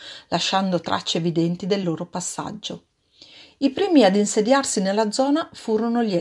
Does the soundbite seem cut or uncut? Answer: uncut